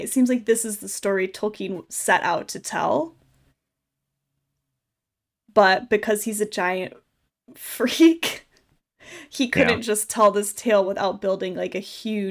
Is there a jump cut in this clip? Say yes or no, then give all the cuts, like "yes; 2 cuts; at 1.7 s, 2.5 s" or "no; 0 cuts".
no; 0 cuts